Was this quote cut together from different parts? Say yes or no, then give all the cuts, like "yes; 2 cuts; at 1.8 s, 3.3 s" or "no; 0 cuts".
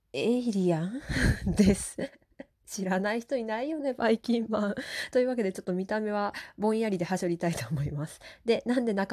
no; 0 cuts